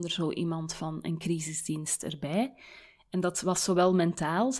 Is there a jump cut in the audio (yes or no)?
no